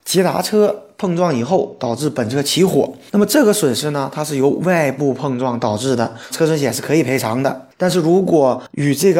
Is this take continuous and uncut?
no; 1 cut; at 6.3 s

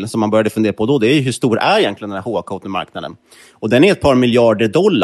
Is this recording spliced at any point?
no; 0 cuts

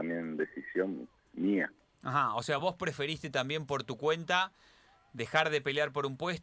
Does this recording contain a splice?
no; 0 cuts

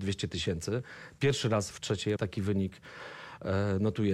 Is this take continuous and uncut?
no; 2 cuts; at 1.7 s, 2.2 s

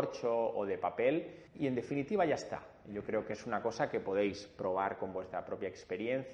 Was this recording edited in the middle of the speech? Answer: yes; 1 cut; at 1.5 s

